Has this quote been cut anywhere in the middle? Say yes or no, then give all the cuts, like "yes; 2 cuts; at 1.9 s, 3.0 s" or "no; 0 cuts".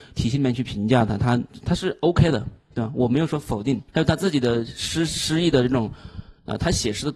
yes; 1 cut; at 3.9 s